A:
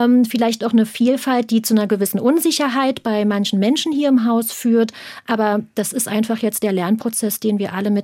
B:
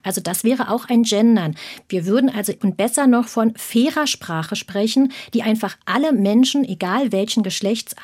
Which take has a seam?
B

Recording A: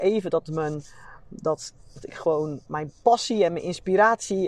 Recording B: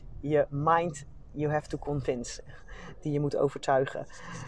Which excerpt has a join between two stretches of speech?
A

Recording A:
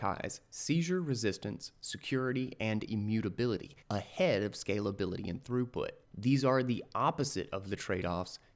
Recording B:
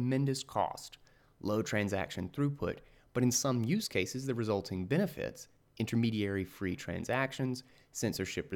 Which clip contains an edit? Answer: A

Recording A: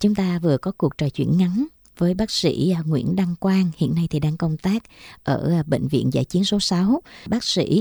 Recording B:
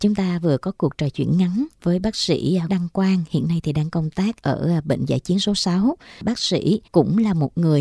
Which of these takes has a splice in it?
B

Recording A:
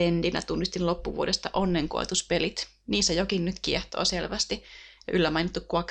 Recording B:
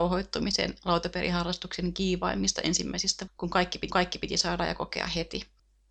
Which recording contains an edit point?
B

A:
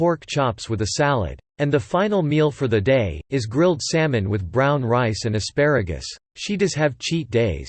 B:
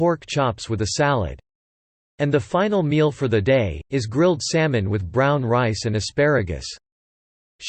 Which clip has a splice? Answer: A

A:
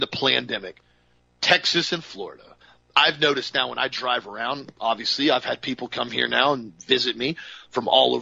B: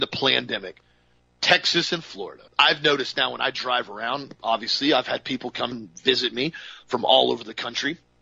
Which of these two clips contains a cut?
B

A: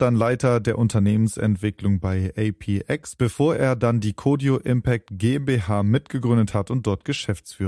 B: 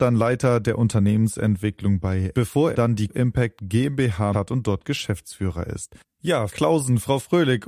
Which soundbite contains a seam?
B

